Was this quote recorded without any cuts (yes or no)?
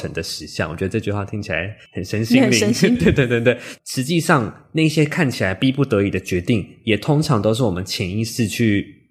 no